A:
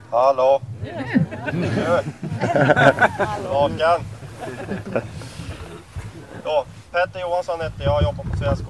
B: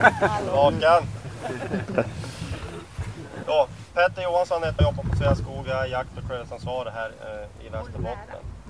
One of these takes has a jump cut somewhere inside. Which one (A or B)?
B